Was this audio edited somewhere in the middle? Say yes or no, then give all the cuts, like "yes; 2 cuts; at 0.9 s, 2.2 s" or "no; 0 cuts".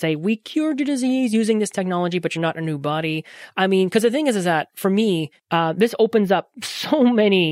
yes; 1 cut; at 5.4 s